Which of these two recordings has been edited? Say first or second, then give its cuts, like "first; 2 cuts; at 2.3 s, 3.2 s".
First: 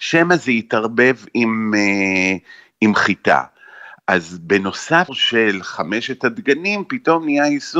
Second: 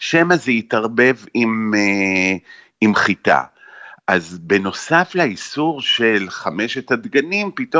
first; 1 cut; at 5.1 s